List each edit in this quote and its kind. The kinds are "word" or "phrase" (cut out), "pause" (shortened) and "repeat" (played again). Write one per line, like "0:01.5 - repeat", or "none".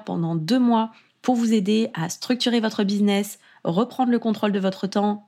none